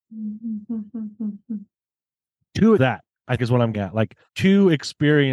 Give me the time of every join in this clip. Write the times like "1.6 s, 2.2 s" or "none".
2.8 s, 3.4 s, 3.7 s, 4.3 s